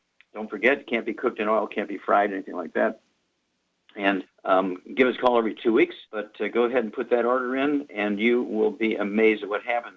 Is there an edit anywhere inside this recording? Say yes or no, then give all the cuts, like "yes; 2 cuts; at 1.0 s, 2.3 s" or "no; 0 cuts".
yes; 2 cuts; at 4.3 s, 6.1 s